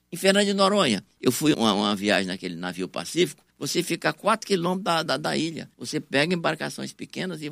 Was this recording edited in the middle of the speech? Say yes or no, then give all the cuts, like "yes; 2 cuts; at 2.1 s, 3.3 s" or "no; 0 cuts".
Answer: yes; 4 cuts; at 1.5 s, 3.5 s, 5.1 s, 5.7 s